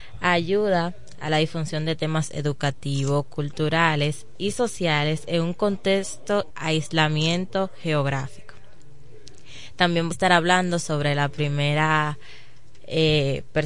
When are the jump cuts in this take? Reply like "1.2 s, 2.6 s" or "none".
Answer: 6.5 s, 10.1 s

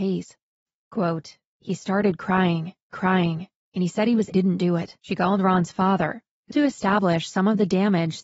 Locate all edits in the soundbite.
2.9 s, 4.3 s, 5.0 s, 6.5 s

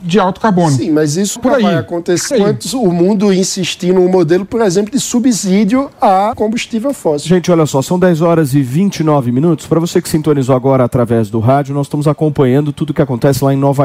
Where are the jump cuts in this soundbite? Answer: 1.4 s, 2.3 s, 6.3 s

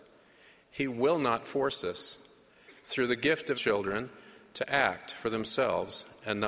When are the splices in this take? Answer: 2.8 s, 3.5 s

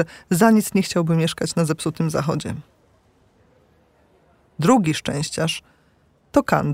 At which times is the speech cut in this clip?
none

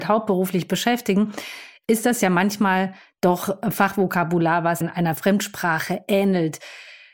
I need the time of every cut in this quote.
4.8 s

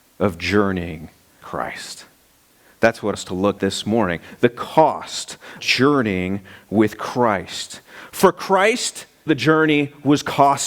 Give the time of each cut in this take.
1.4 s, 3.1 s, 3.6 s, 5.6 s, 9.3 s

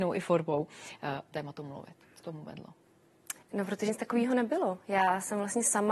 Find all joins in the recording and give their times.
1.3 s, 2.2 s, 3.4 s, 3.9 s

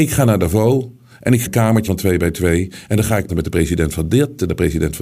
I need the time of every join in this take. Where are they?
1.5 s, 1.9 s, 3.3 s

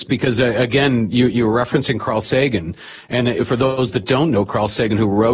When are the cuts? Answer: none

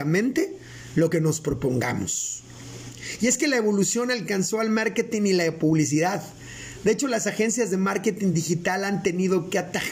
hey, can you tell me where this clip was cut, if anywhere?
none

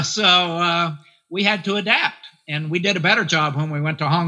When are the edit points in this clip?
none

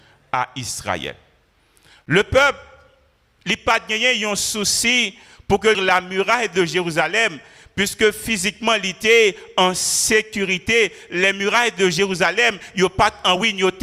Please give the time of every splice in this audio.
5.7 s

